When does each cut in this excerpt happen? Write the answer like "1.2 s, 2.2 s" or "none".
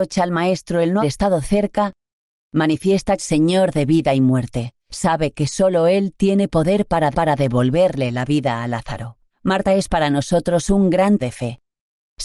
1.0 s, 3.2 s, 4.8 s, 7.1 s, 9.3 s, 11.2 s

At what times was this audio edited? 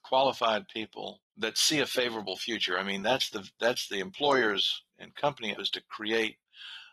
1.3 s, 4.9 s, 5.5 s

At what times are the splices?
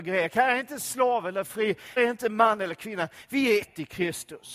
2.0 s, 3.6 s

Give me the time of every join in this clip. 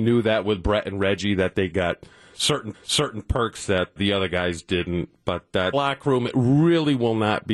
2.7 s, 4.0 s, 5.7 s

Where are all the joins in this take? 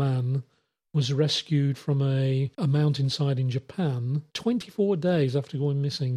2.5 s, 4.3 s

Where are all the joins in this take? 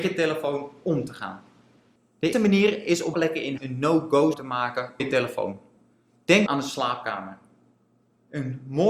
2.3 s, 3.1 s, 3.6 s, 4.3 s, 5.0 s, 6.5 s

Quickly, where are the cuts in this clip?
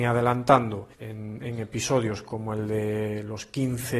0.9 s

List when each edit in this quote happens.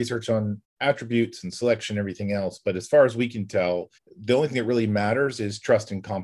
4.0 s

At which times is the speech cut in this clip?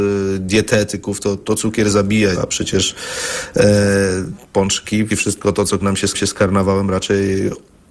1.4 s, 2.4 s, 5.1 s, 5.8 s, 6.1 s

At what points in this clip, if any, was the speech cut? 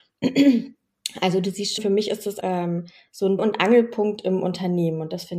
1.8 s, 2.4 s, 3.4 s

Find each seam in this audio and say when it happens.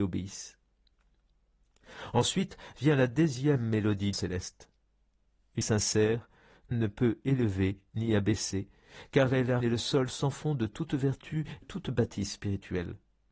4.1 s, 5.6 s, 6.7 s, 9.6 s, 11.6 s

